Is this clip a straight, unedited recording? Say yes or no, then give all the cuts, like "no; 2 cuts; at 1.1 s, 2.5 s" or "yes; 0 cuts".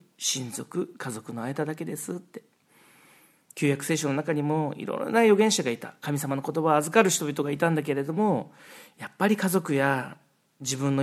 yes; 0 cuts